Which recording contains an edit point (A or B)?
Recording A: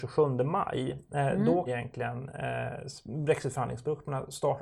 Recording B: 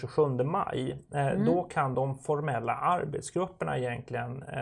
A